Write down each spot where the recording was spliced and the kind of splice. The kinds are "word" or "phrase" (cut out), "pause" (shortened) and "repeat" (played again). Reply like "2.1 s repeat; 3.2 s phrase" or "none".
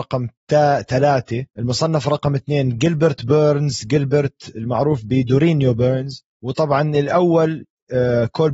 1.5 s pause; 6.3 s pause